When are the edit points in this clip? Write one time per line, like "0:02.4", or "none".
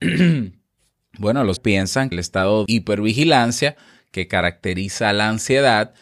0:01.6
0:02.1
0:02.7